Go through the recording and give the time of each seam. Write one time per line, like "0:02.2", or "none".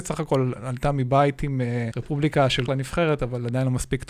0:01.9
0:02.7